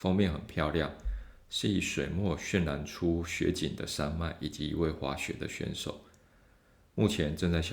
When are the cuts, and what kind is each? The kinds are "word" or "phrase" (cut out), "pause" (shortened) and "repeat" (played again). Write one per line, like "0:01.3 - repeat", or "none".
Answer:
none

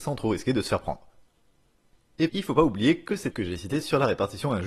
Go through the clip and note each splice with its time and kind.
0:02.3 - word
0:03.3 - word

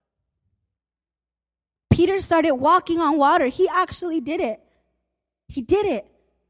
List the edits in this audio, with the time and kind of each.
none

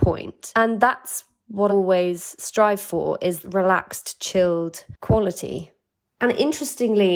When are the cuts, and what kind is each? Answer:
0:01.7 - word
0:03.4 - word

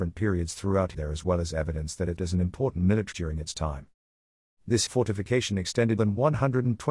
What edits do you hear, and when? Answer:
0:00.9 - word
0:02.2 - word
0:03.1 - word
0:04.9 - word
0:06.0 - word

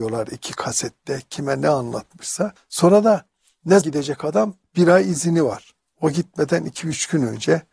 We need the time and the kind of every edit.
0:02.6 - pause
0:03.8 - word

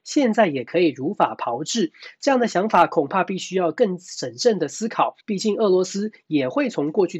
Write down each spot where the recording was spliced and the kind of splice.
0:05.2 - pause

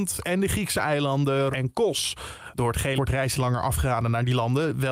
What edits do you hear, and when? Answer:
0:01.5 - word
0:03.0 - word
0:03.3 - word

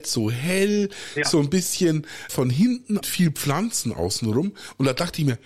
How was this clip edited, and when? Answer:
0:02.3 - word
0:03.0 - phrase

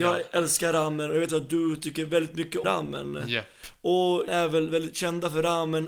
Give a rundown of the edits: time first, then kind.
0:01.3 - word
0:02.6 - word
0:04.3 - word

